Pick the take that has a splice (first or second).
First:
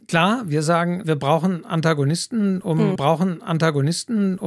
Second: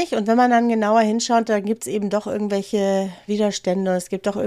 first